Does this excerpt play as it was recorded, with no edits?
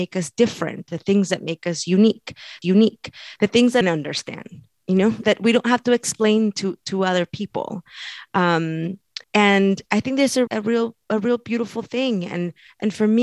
no; 5 cuts; at 2.6 s, 3.8 s, 5.2 s, 9.2 s, 10.5 s

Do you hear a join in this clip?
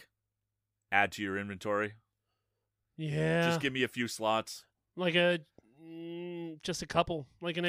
no; 0 cuts

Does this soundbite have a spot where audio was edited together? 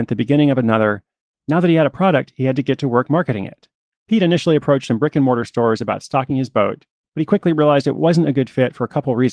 no; 0 cuts

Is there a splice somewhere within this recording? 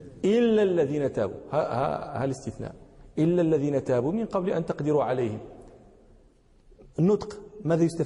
no; 0 cuts

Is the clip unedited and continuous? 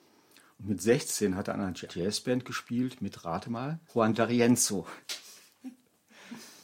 no; 2 cuts; at 1.9 s, 3.9 s

